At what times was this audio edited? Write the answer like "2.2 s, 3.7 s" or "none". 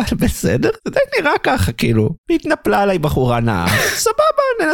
2.2 s